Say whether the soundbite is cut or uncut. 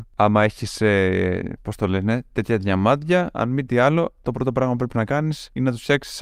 uncut